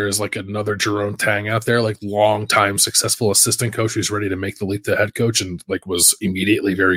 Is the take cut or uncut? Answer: uncut